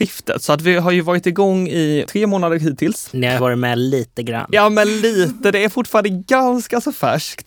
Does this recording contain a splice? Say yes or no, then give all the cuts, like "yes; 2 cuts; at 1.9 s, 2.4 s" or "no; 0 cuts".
yes; 2 cuts; at 2.1 s, 3.4 s